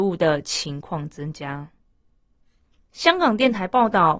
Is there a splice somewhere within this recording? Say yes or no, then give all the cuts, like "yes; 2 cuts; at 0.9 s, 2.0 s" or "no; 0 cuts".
yes; 1 cut; at 2.6 s